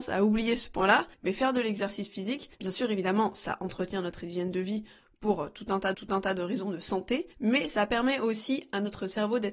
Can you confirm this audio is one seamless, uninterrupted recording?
no; 4 cuts; at 1.1 s, 2.5 s, 5.9 s, 7.3 s

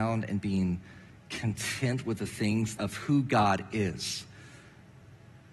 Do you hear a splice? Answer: yes; 1 cut; at 2.8 s

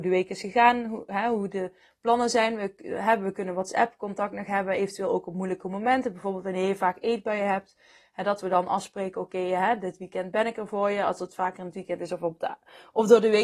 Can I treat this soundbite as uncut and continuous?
yes; 0 cuts

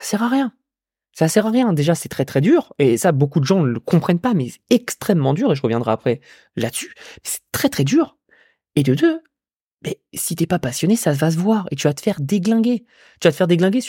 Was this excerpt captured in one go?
yes; 0 cuts

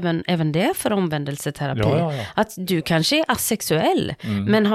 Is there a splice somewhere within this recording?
no; 0 cuts

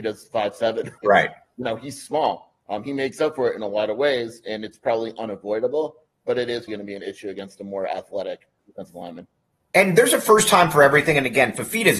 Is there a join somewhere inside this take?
yes; 3 cuts; at 1.0 s, 6.7 s, 8.6 s

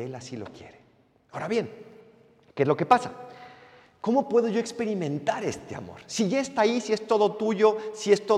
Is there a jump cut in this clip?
no; 0 cuts

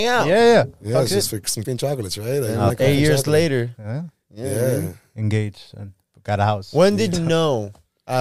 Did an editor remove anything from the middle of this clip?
yes; 3 cuts; at 1.6 s, 2.7 s, 7.1 s

